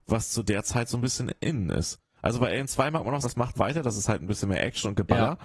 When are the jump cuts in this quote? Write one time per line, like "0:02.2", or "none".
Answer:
0:03.2
0:03.5